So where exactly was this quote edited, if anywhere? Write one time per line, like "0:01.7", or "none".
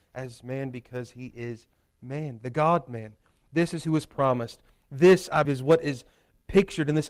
0:05.4